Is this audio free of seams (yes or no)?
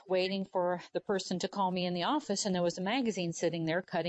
yes